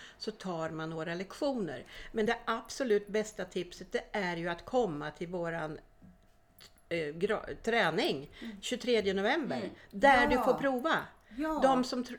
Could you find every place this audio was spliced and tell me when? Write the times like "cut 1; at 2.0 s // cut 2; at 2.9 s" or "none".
none